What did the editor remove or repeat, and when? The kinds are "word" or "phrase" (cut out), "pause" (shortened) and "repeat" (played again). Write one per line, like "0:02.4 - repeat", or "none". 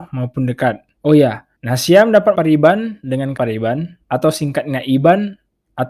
0:01.0 - pause
0:01.6 - pause
0:02.3 - word
0:03.4 - word
0:04.0 - pause